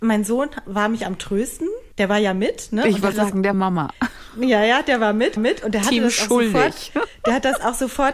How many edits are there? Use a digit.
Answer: 4